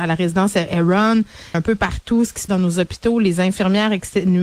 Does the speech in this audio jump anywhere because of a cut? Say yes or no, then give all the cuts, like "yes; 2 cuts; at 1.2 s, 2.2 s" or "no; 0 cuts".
yes; 2 cuts; at 1.5 s, 2.5 s